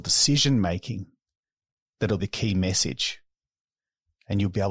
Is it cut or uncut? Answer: cut